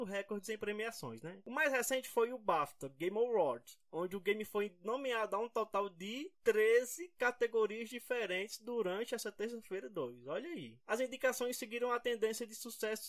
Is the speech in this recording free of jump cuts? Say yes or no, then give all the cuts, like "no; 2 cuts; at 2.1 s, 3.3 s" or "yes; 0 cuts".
yes; 0 cuts